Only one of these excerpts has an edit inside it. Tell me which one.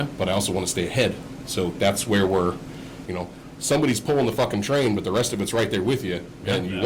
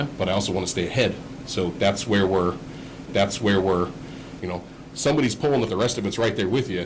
second; 2 cuts; at 3.1 s, 5.7 s

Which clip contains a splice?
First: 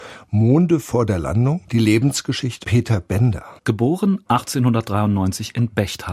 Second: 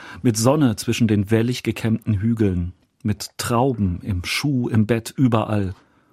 first; 3 cuts; at 1.6 s, 2.6 s, 3.6 s

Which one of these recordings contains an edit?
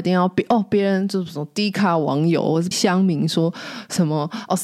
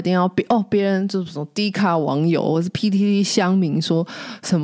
first; 1 cut; at 2.7 s

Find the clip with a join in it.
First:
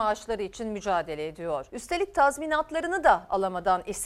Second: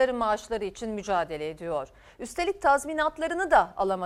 first; 1 cut; at 1.7 s

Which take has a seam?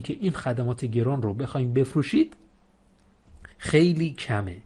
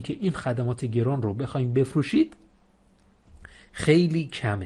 first; 1 cut; at 3.5 s

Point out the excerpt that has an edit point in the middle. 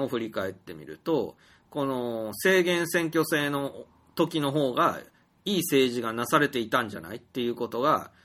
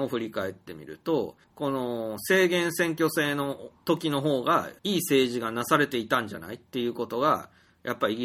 second; 3 cuts; at 1.4 s, 3.8 s, 4.8 s

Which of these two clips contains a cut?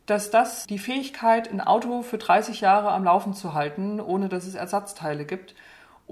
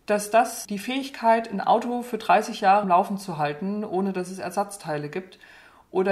second; 1 cut; at 2.8 s

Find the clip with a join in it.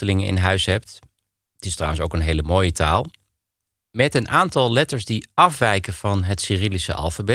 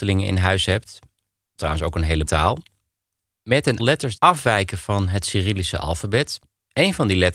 second; 4 cuts; at 1.6 s, 2.3 s, 3.8 s, 4.2 s

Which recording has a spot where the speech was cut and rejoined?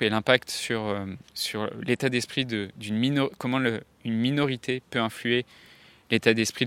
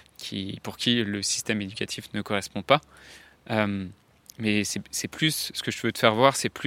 first; 1 cut; at 1.3 s

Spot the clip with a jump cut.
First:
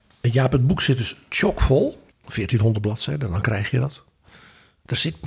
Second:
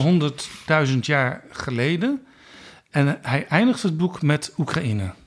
first; 1 cut; at 2.1 s

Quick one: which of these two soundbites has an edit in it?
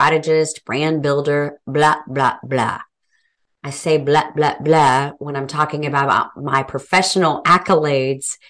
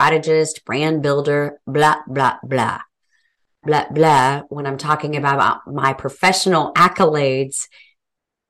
second; 1 cut; at 3.6 s

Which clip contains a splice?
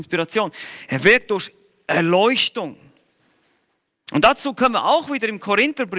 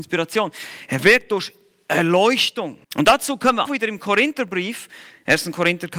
second; 2 cuts; at 2.8 s, 3.6 s

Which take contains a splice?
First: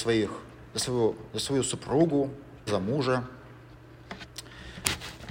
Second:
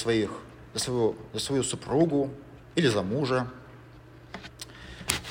first; 1 cut; at 2.7 s

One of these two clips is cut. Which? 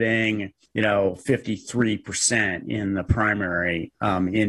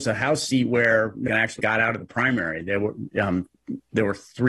second; 2 cuts; at 1.3 s, 1.6 s

